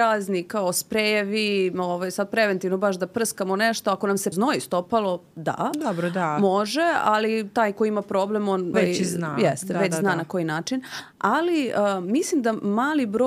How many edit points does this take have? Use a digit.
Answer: 2